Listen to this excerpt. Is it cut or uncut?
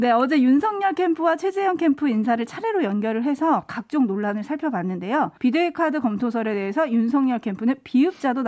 cut